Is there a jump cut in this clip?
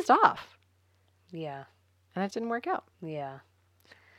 yes; 2 cuts; at 2.3 s, 2.9 s

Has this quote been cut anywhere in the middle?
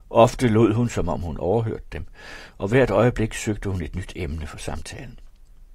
no; 0 cuts

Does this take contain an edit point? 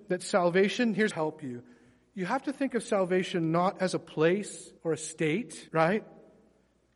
yes; 3 cuts; at 1.1 s, 4.8 s, 5.7 s

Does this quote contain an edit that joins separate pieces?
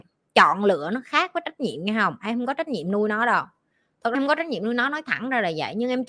yes; 1 cut; at 4.1 s

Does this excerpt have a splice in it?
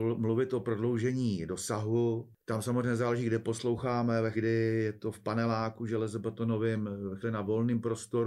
yes; 2 cuts; at 4.3 s, 7.2 s

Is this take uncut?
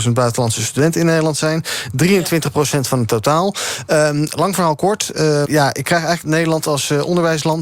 no; 2 cuts; at 5.5 s, 6.2 s

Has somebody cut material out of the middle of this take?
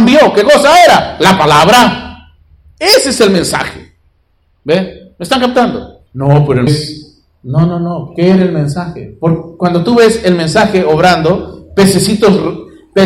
yes; 3 cuts; at 6.1 s, 6.7 s, 7.3 s

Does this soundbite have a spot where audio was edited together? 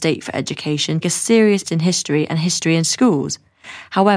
yes; 2 cuts; at 1.0 s, 1.6 s

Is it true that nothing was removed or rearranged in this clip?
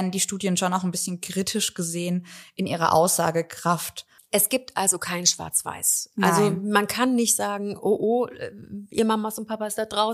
yes; 0 cuts

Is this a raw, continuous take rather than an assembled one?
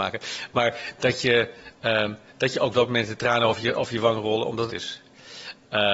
no; 3 cuts; at 1.7 s, 2.7 s, 4.7 s

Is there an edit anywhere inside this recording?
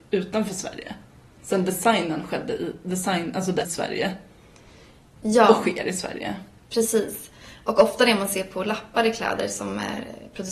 yes; 1 cut; at 3.6 s

